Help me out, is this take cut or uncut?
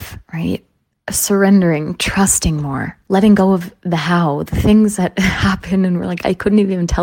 uncut